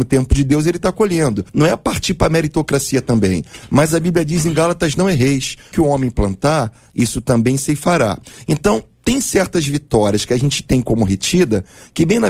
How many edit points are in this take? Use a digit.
2